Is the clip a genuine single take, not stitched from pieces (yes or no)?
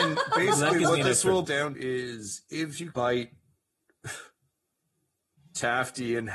no